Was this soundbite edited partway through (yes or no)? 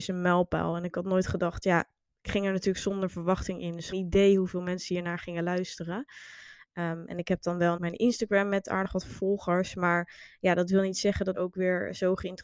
yes